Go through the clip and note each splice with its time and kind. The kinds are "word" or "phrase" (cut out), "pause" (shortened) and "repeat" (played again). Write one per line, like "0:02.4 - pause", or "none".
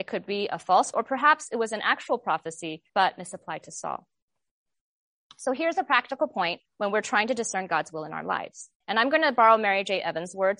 0:00.9 - word
0:02.9 - pause
0:06.7 - pause
0:08.8 - pause